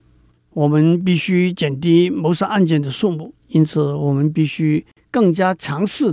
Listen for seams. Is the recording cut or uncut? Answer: cut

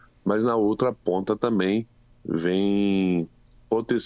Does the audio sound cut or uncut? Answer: uncut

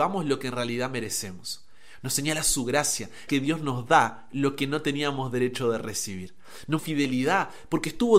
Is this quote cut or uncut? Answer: cut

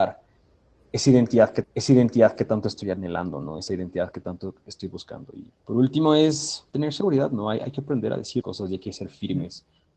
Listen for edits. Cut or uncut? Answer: cut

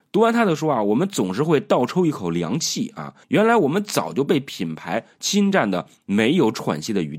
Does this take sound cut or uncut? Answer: cut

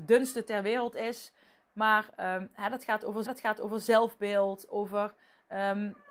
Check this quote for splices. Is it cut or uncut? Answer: cut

